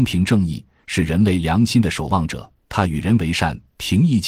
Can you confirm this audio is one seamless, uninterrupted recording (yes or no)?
no